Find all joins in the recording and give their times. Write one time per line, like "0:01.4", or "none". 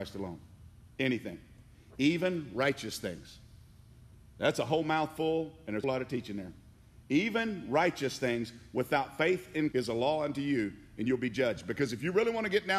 0:05.8
0:09.7